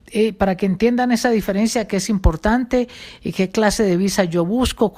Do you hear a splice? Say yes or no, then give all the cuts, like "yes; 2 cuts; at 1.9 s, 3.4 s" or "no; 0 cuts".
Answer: no; 0 cuts